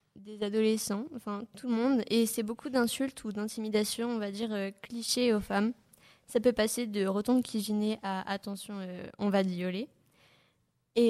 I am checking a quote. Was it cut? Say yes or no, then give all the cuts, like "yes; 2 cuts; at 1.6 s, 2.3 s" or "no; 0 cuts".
no; 0 cuts